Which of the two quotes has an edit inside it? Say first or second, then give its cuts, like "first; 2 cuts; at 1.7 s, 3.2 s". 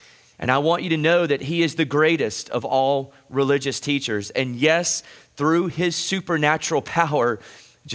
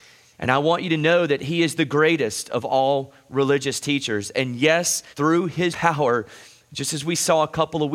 second; 2 cuts; at 5.1 s, 5.7 s